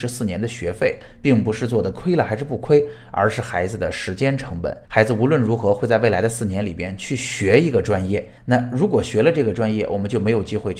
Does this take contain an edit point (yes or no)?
yes